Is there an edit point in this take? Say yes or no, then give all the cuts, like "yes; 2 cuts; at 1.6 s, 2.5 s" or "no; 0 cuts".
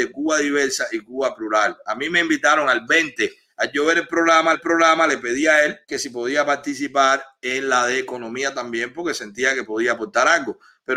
yes; 2 cuts; at 4.5 s, 5.8 s